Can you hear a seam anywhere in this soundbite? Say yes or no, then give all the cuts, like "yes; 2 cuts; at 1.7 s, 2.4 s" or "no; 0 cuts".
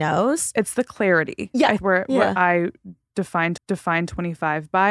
yes; 2 cuts; at 1.8 s, 3.6 s